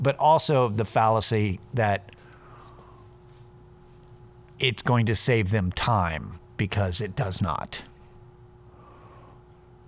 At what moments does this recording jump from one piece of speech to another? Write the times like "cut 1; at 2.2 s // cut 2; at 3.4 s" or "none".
cut 1; at 6.4 s